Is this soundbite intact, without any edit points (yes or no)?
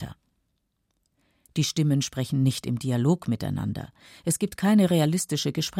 yes